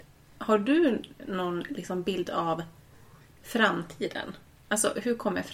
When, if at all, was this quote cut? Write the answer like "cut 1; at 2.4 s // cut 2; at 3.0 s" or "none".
none